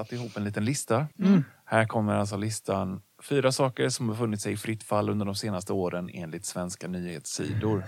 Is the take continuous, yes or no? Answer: no